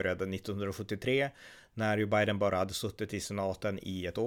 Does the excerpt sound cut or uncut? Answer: uncut